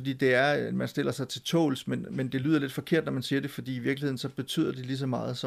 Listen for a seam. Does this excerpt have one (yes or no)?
no